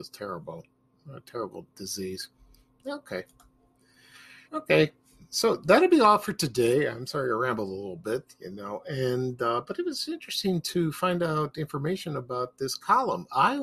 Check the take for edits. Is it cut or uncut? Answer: cut